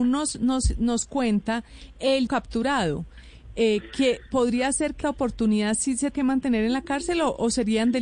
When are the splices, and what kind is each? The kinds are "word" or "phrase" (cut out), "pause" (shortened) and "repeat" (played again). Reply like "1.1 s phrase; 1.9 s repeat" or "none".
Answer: 2.3 s phrase; 5.0 s phrase; 6.1 s word

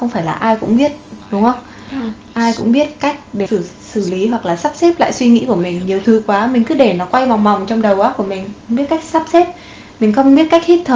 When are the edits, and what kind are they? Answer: 3.5 s word; 6.0 s phrase

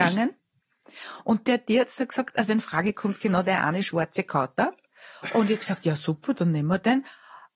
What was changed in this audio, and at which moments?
none

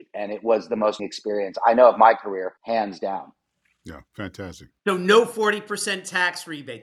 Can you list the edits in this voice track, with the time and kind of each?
1.0 s word; 2.6 s pause; 4.1 s pause

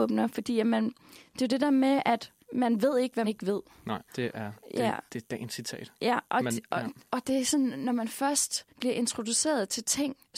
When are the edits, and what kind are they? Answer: 2.4 s pause; 3.2 s word; 4.1 s pause; 8.7 s pause

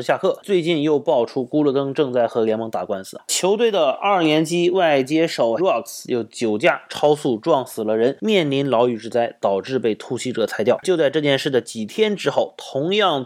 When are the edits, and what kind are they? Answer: 5.6 s word

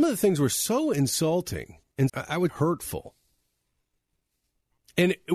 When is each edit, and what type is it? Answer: 2.1 s word; 2.5 s word

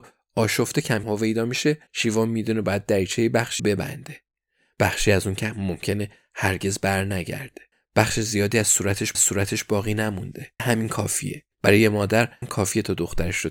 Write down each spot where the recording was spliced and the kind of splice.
1.0 s word; 1.9 s pause; 3.6 s phrase; 7.7 s pause; 9.1 s repeat; 10.6 s word; 11.5 s pause; 12.4 s word

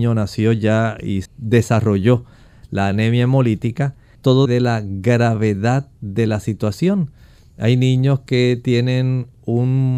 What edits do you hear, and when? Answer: 1.3 s word; 4.1 s word; 4.5 s word

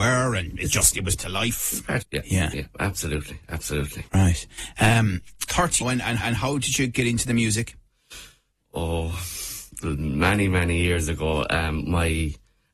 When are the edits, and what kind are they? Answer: 1.2 s word; 2.0 s phrase; 4.1 s pause; 5.5 s word; 5.8 s word; 6.2 s repeat

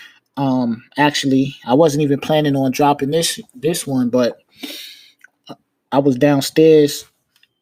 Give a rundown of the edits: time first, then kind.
none

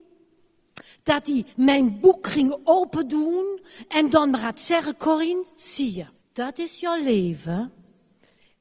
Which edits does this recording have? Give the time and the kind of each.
1.5 s pause; 6.1 s pause

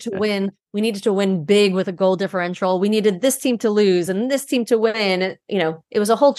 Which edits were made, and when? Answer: none

